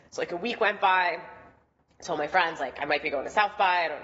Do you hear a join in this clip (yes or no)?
no